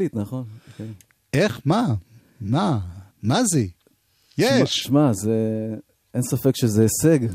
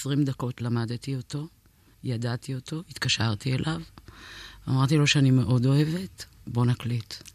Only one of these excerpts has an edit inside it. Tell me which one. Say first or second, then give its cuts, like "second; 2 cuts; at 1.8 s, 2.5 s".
first; 1 cut; at 3.1 s